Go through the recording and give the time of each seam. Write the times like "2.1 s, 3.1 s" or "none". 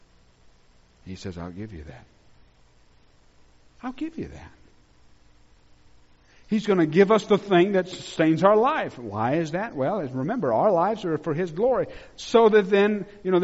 none